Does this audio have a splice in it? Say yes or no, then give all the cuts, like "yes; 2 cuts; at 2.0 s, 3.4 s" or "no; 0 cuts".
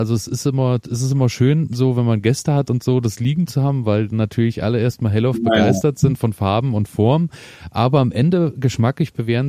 no; 0 cuts